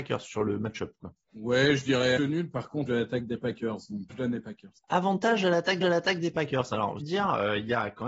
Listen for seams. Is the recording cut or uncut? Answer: cut